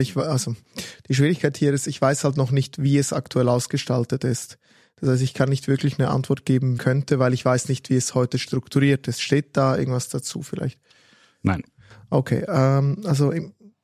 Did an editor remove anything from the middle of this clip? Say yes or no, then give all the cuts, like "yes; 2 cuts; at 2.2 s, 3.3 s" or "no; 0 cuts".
yes; 1 cut; at 6.8 s